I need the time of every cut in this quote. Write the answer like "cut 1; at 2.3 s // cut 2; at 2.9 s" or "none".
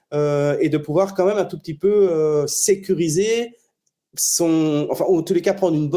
none